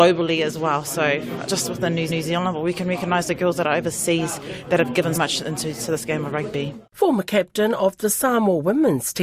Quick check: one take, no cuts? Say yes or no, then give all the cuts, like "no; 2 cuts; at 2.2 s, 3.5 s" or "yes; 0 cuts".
no; 4 cuts; at 1.5 s, 2.1 s, 5.1 s, 6.9 s